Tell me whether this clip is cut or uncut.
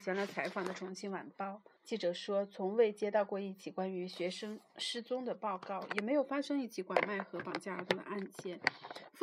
cut